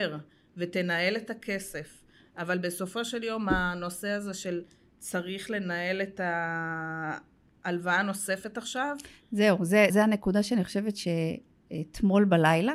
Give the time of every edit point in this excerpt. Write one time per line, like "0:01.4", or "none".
0:09.9